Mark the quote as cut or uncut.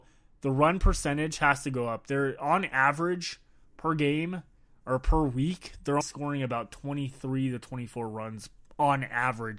cut